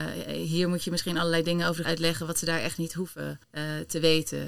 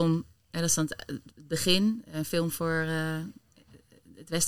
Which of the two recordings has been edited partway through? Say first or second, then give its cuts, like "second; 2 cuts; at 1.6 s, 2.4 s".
first; 2 cuts; at 1.8 s, 3.4 s